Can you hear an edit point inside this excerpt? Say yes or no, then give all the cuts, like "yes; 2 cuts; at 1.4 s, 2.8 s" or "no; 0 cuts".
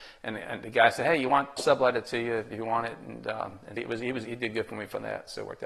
yes; 2 cuts; at 1.6 s, 3.8 s